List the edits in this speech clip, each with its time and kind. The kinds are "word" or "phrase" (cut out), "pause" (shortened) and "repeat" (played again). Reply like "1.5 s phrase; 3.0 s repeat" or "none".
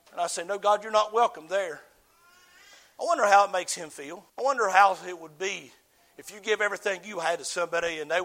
4.3 s pause

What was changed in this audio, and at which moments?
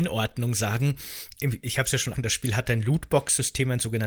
2.1 s word

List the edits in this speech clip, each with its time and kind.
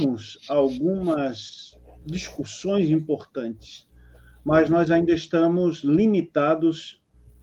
none

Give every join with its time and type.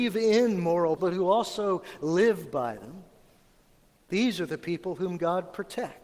1.0 s word

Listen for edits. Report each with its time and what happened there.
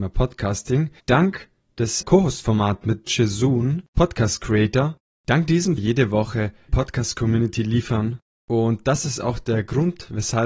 1.0 s pause; 2.0 s word; 3.1 s word; 3.9 s pause; 5.8 s phrase; 6.7 s phrase

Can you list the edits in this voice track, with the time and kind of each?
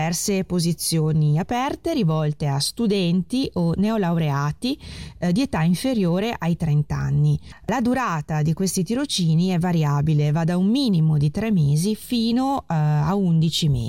none

